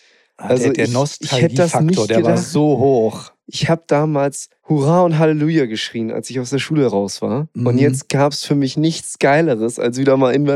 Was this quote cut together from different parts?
yes; 1 cut; at 4.6 s

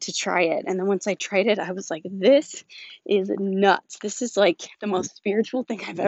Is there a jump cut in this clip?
no; 0 cuts

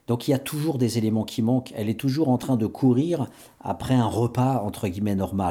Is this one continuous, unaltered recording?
yes; 0 cuts

